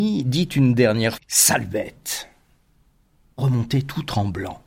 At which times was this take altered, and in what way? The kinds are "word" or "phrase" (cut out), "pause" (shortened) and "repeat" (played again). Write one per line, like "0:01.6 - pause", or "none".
0:01.1 - word
0:03.4 - word